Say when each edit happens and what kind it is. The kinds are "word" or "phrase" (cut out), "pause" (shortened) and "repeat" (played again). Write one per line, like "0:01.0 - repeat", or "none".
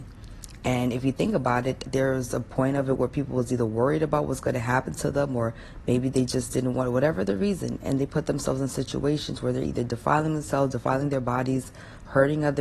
0:01.9 - word